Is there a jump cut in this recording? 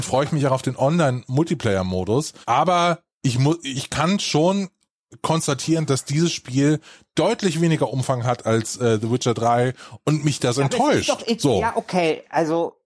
yes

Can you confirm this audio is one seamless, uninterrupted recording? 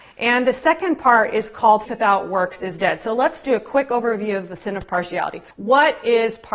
no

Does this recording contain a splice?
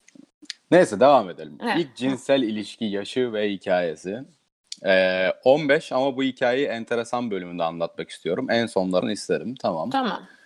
yes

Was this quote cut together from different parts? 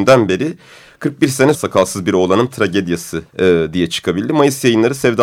yes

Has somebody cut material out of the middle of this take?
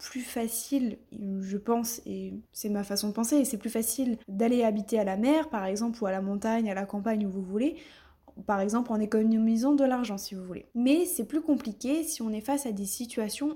yes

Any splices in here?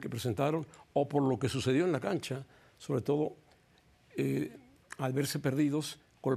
no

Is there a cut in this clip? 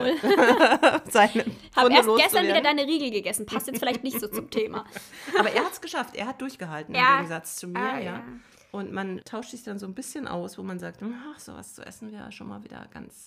yes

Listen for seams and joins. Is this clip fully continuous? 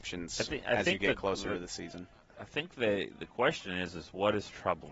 yes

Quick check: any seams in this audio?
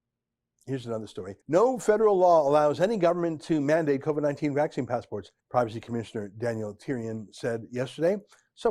yes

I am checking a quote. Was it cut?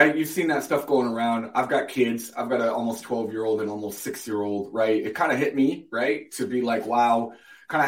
no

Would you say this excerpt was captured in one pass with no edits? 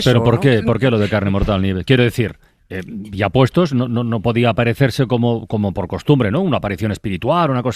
yes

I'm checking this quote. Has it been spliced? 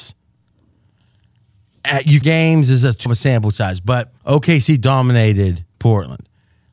yes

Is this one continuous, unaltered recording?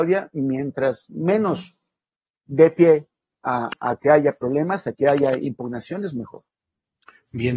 yes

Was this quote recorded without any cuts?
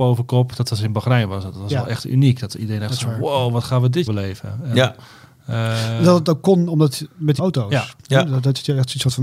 no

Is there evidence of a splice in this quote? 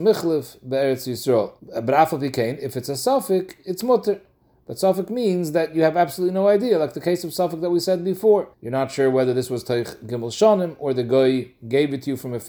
yes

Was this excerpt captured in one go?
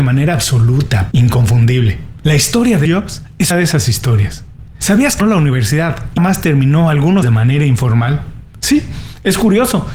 no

